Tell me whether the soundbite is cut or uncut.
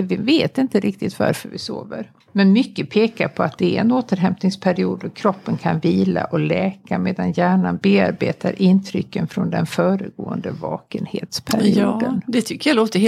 cut